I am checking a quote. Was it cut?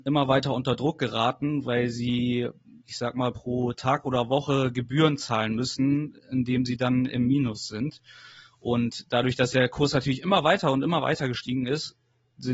no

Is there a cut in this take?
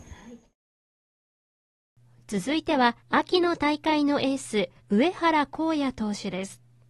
yes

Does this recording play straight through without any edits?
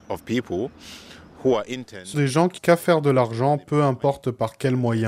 no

